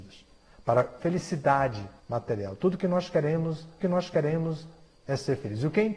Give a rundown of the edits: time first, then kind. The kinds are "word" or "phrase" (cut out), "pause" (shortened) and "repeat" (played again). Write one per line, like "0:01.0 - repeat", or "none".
0:01.0 - word
0:02.0 - pause
0:03.8 - repeat